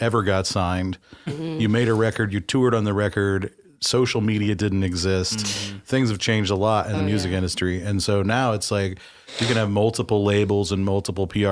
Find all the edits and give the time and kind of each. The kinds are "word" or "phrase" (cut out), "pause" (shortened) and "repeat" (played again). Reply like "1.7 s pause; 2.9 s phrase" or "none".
none

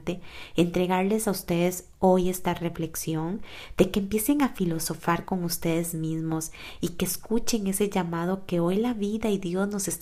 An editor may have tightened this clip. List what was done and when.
none

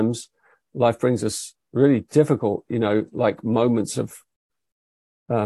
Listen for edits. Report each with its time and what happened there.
none

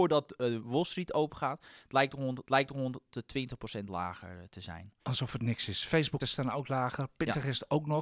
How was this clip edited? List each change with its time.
2.5 s repeat; 5.0 s pause; 6.2 s phrase

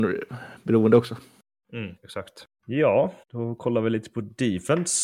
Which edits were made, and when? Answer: 2.0 s pause; 3.2 s pause

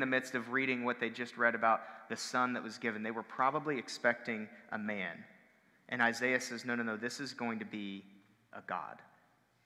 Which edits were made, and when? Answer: none

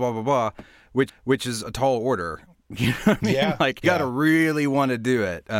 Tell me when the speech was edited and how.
1.1 s repeat; 3.8 s word

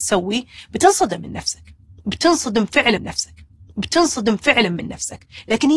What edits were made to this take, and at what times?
3.0 s repeat

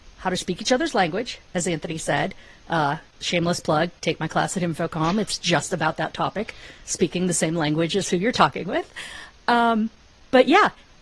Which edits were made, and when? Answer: none

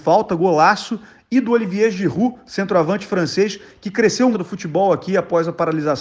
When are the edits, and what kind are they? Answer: 4.3 s phrase

